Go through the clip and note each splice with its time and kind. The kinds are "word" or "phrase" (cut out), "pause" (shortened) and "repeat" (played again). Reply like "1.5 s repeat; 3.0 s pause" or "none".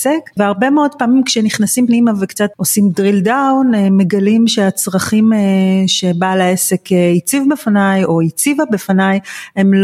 none